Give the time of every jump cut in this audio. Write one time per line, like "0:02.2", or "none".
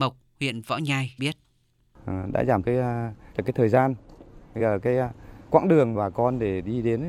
0:01.2
0:02.6
0:03.3
0:04.6
0:05.5
0:05.9